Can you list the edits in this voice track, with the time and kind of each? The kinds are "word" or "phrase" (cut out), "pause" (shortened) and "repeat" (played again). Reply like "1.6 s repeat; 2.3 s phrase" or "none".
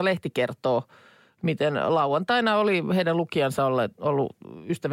none